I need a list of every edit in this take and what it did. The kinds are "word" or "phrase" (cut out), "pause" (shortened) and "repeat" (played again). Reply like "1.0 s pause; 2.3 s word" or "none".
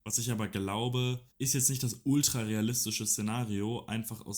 1.3 s pause